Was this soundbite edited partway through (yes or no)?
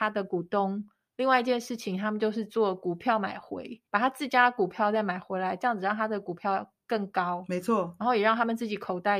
yes